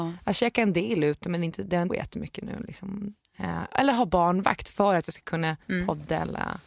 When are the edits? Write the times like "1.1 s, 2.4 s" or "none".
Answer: 1.9 s, 5.6 s